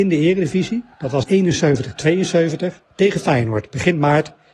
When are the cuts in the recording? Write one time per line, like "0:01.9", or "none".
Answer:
0:00.9
0:01.2
0:02.8